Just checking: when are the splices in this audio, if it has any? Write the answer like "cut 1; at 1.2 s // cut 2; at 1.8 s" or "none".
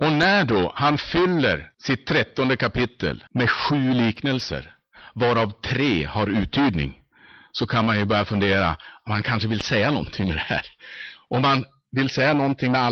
cut 1; at 1.7 s // cut 2; at 3.3 s

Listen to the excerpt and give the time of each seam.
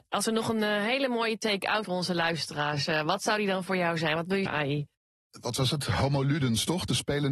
cut 1; at 1.8 s // cut 2; at 4.5 s

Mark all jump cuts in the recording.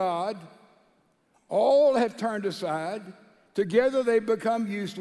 none

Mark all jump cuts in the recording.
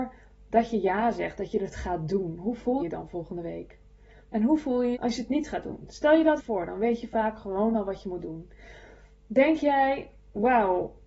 cut 1; at 2.8 s // cut 2; at 4.9 s // cut 3; at 6.4 s

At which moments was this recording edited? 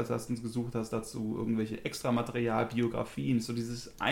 none

